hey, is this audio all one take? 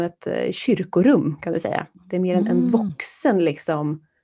yes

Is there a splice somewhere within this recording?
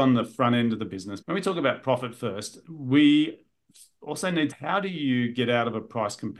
yes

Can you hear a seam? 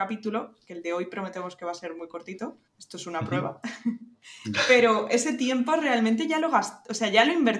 yes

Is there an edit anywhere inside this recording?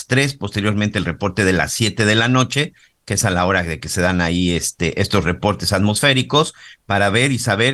no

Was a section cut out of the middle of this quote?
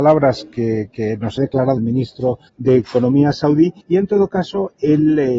yes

